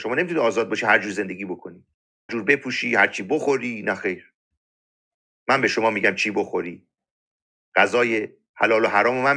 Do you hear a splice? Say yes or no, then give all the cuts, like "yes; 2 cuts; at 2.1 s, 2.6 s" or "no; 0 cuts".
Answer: yes; 1 cut; at 2.3 s